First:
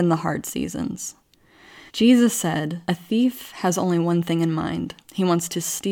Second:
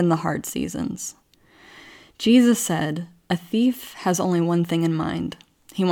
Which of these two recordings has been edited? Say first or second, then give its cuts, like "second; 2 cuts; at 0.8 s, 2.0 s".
first; 3 cuts; at 1.9 s, 2.8 s, 5.0 s